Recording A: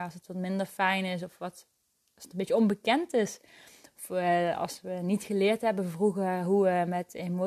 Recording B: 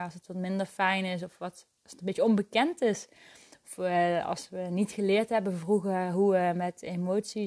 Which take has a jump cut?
B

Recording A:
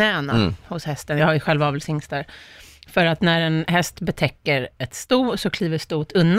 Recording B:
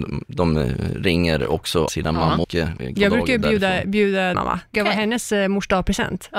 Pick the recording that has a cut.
B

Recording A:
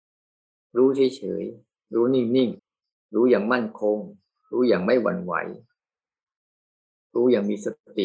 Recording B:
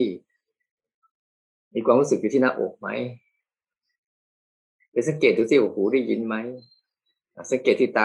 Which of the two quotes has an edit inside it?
A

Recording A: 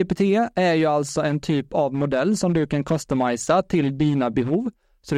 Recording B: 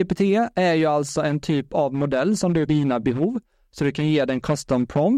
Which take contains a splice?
B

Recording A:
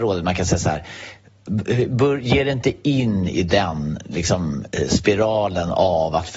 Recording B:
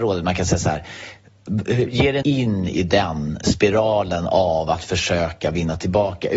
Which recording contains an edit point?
B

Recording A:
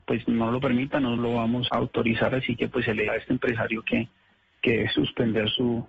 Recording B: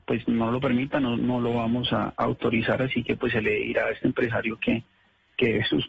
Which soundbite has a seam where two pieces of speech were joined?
A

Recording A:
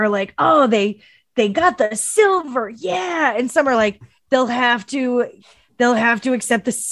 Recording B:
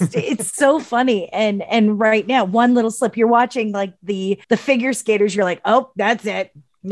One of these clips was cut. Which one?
B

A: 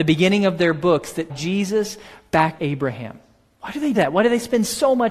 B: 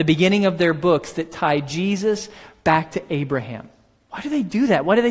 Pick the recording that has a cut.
A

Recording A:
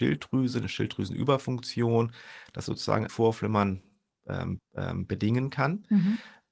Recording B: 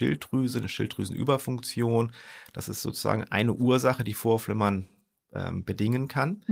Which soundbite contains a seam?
A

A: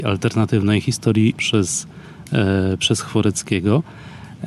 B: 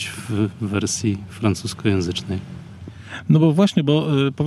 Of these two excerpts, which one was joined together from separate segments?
A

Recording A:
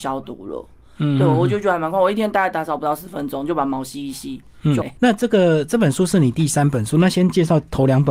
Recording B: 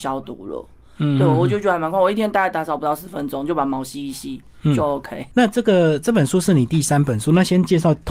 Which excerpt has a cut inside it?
A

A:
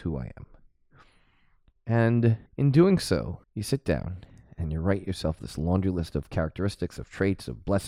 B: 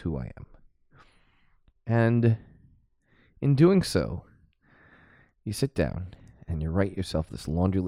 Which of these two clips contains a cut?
A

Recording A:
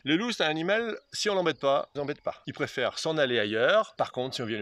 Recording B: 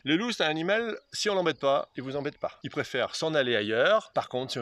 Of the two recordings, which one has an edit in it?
A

